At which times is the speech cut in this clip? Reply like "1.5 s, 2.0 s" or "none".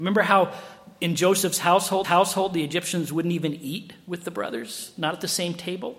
2.0 s